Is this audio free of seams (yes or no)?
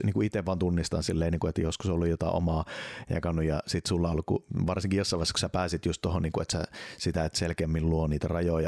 yes